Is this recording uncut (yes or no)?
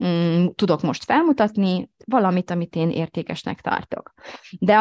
yes